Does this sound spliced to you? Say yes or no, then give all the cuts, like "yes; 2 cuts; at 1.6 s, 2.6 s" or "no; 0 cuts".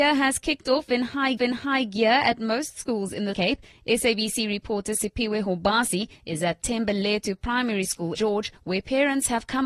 yes; 3 cuts; at 1.4 s, 3.3 s, 8.1 s